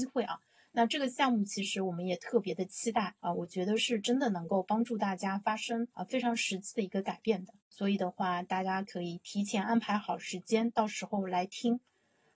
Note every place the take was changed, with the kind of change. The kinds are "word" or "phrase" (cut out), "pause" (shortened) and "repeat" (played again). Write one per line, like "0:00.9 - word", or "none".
0:03.2 - pause
0:05.9 - pause
0:07.6 - pause

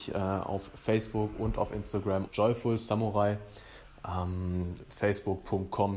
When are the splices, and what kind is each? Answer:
0:02.3 - word

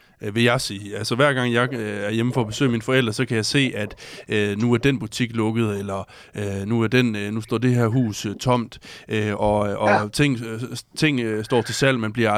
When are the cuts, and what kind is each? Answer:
none

